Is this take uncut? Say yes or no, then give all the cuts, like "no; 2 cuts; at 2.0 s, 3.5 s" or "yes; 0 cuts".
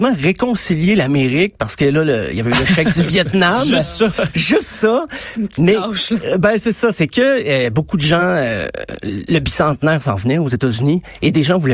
yes; 0 cuts